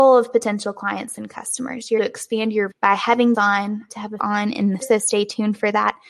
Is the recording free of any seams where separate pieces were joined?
no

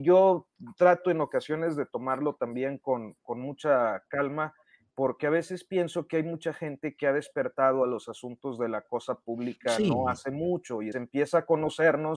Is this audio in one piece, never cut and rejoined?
no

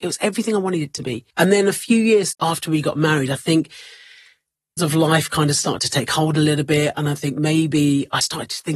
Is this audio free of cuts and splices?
no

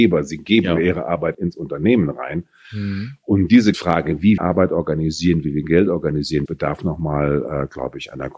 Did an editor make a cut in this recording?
yes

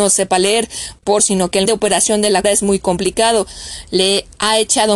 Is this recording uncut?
no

